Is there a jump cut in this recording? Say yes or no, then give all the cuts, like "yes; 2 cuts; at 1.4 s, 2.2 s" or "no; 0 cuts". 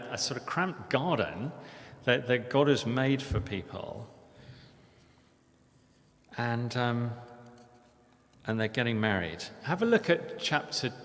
no; 0 cuts